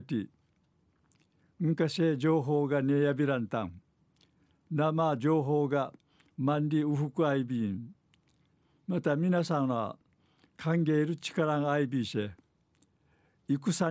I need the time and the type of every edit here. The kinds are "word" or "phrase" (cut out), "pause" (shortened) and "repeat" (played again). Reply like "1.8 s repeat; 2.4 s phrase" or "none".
none